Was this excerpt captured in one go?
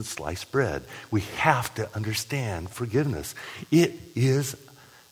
yes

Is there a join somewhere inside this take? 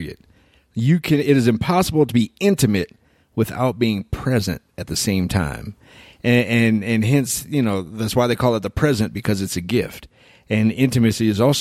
no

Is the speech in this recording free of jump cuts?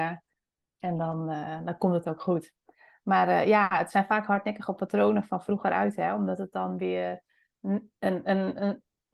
yes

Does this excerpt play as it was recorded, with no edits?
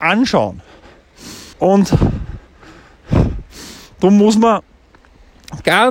no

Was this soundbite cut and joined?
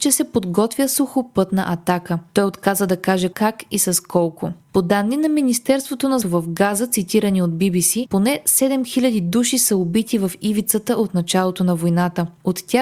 yes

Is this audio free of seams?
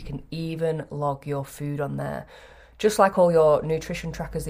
yes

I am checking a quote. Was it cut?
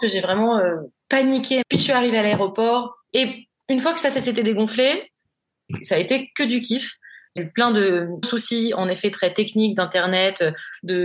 yes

